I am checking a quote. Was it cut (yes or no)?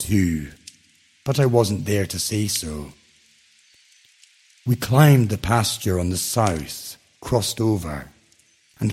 no